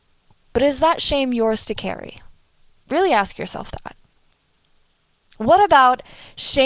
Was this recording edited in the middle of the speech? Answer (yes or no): no